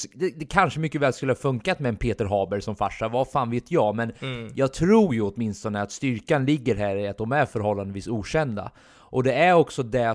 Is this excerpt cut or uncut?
uncut